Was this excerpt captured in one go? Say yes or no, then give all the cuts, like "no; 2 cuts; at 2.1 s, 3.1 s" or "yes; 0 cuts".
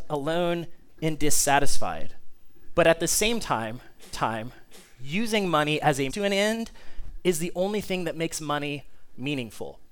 no; 2 cuts; at 4.1 s, 6.1 s